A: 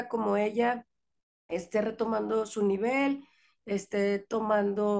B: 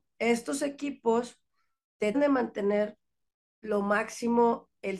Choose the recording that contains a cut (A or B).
B